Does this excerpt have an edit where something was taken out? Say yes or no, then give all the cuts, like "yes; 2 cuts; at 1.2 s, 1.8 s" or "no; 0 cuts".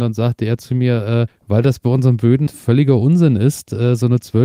yes; 2 cuts; at 1.3 s, 2.5 s